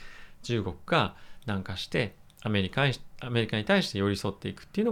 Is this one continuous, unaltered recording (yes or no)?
yes